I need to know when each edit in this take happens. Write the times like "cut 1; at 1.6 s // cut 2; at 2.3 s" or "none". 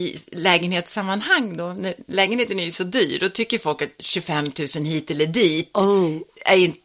none